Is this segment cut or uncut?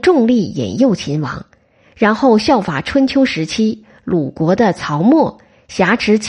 uncut